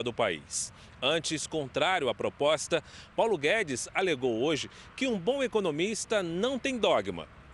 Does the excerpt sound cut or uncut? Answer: uncut